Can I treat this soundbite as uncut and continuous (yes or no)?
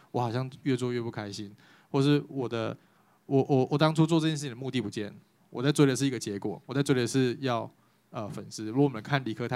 yes